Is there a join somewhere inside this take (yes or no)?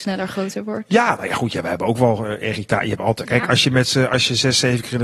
no